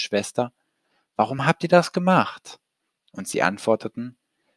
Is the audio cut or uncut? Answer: uncut